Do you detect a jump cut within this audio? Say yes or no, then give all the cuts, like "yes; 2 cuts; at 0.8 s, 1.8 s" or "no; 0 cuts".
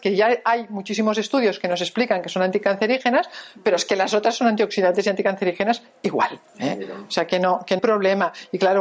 yes; 2 cuts; at 6.5 s, 7.8 s